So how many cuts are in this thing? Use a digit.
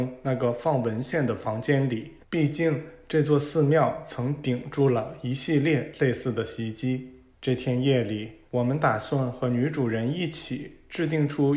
3